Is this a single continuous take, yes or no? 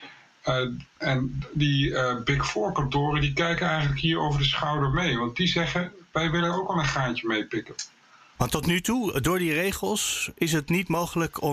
yes